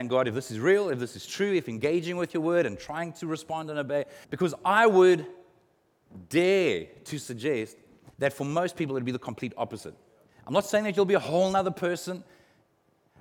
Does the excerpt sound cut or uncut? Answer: cut